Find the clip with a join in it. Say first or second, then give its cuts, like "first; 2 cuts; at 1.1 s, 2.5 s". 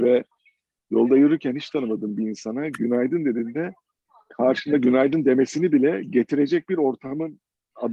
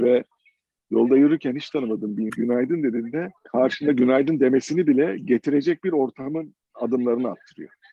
second; 3 cuts; at 2.3 s, 3.4 s, 6.6 s